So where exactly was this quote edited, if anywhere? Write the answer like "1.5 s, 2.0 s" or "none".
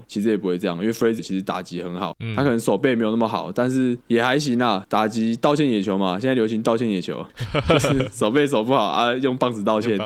1.2 s